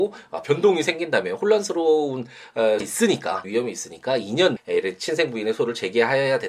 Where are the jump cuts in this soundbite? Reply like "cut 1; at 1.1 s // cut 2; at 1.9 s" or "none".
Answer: cut 1; at 2.8 s // cut 2; at 3.4 s // cut 3; at 4.6 s